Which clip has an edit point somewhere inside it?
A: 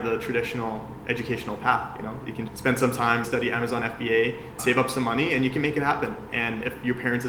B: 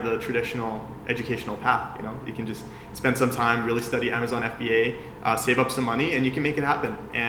A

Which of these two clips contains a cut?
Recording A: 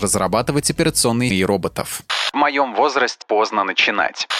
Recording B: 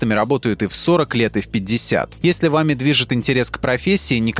A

